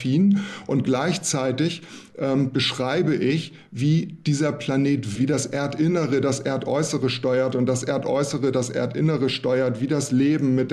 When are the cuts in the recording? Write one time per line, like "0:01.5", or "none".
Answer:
0:05.2

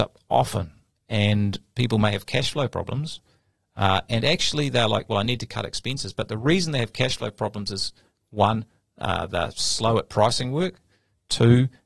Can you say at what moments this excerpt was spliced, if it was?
none

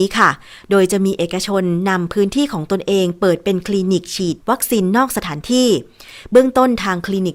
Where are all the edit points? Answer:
0:04.4

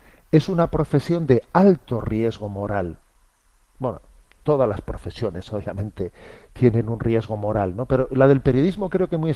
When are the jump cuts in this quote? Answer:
none

